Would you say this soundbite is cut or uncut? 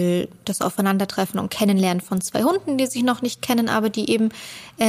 uncut